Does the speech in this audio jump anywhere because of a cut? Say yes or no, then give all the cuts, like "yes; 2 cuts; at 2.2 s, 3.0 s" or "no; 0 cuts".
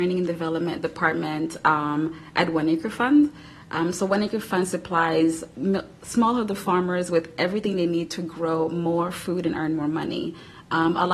no; 0 cuts